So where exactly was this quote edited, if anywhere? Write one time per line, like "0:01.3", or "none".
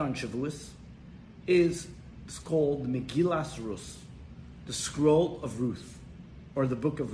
none